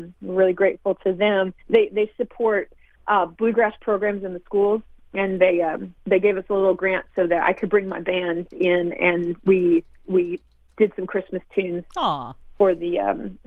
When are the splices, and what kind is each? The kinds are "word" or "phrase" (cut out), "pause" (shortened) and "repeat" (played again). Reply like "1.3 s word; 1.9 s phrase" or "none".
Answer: 1.6 s pause; 6.0 s pause